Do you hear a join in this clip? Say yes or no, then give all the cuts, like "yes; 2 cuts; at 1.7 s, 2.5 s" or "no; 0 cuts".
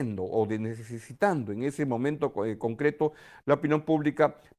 no; 0 cuts